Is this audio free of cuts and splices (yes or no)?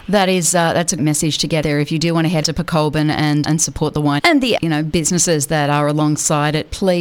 no